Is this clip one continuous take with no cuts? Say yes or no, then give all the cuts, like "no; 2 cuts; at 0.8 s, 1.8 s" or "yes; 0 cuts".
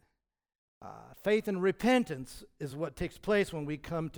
yes; 0 cuts